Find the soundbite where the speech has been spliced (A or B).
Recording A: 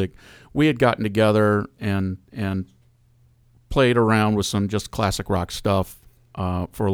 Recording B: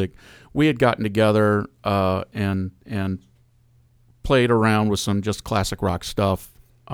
A